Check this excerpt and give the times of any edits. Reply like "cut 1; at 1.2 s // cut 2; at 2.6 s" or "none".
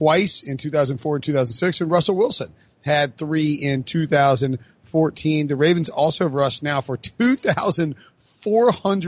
none